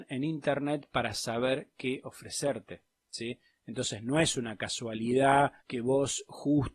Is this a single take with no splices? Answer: no; 1 cut; at 5.6 s

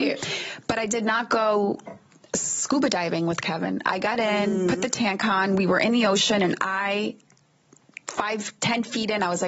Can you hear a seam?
no; 0 cuts

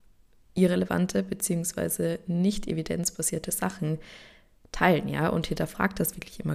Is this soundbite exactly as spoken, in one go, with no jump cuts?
yes; 0 cuts

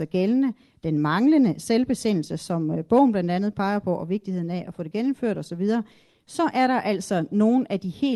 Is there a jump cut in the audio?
no; 0 cuts

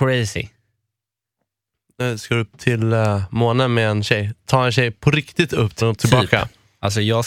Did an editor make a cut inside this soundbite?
yes; 1 cut; at 5.8 s

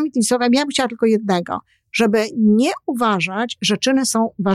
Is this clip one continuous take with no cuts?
yes; 0 cuts

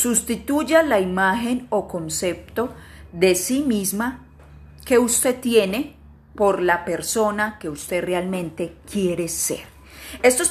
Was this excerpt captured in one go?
yes; 0 cuts

